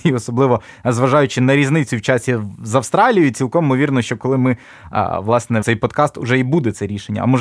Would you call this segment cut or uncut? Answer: cut